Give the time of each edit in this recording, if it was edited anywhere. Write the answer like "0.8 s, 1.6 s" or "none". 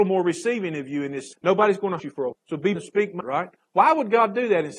1.3 s, 2.0 s, 2.3 s, 2.8 s, 3.2 s

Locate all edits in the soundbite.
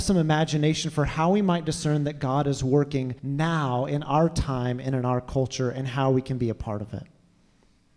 3.2 s

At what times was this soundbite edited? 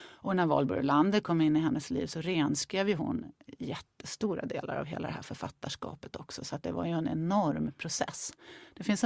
none

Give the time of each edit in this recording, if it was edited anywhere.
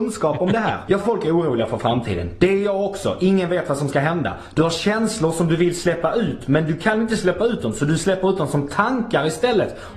1.0 s

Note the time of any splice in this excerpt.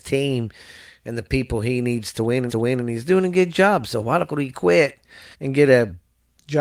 2.5 s, 4.3 s, 5.3 s

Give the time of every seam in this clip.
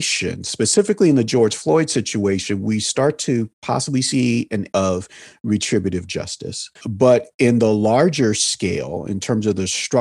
4.7 s, 6.8 s

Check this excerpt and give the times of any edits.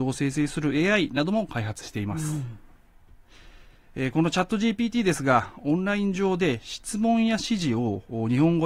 none

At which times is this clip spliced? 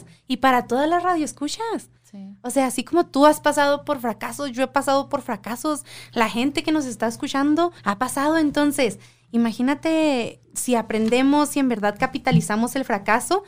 2.0 s, 7.8 s, 10.4 s

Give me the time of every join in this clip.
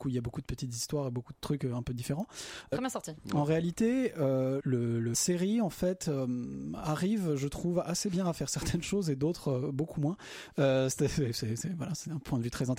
2.7 s, 4.6 s, 5.1 s

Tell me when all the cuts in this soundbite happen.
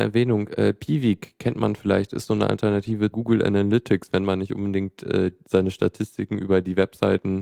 3.1 s

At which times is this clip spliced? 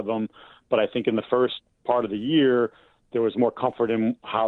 none

